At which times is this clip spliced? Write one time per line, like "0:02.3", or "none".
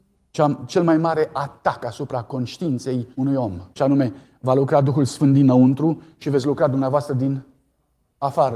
0:03.1
0:03.7